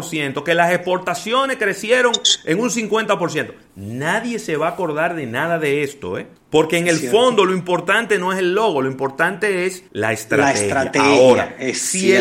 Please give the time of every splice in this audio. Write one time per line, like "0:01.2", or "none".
0:06.4
0:09.9

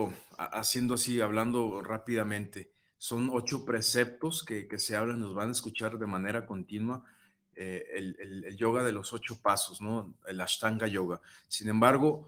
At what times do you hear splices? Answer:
none

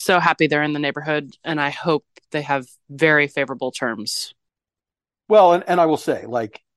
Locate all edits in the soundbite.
none

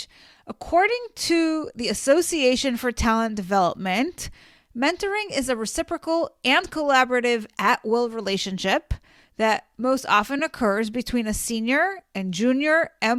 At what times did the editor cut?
none

